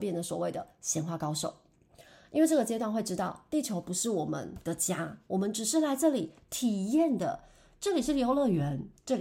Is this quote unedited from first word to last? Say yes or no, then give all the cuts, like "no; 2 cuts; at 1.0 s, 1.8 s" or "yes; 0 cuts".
yes; 0 cuts